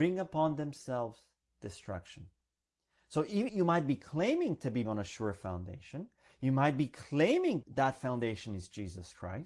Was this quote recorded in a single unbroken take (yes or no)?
no